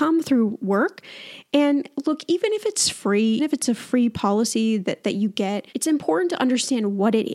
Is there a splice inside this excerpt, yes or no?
yes